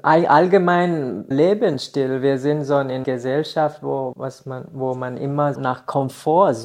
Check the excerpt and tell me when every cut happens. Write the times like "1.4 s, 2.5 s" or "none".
1.3 s, 3.0 s, 4.1 s, 5.5 s